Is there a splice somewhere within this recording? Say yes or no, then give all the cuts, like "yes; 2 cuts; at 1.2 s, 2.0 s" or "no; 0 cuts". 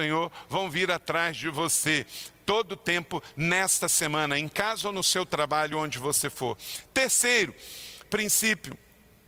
no; 0 cuts